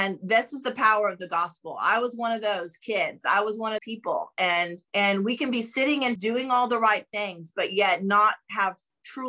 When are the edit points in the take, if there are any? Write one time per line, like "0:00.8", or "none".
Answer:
0:03.8
0:04.8
0:06.2